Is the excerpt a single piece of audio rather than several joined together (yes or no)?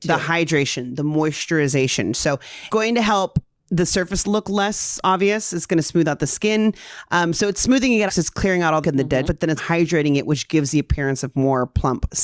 no